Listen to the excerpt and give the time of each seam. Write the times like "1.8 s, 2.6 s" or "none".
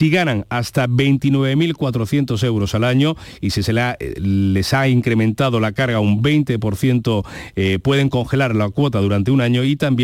none

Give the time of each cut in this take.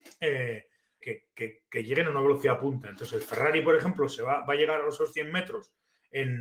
1.0 s

